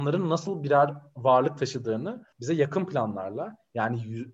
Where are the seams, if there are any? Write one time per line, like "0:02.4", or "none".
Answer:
0:02.3